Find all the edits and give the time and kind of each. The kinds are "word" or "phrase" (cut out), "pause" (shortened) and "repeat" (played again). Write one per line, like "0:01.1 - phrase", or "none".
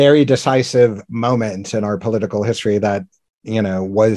none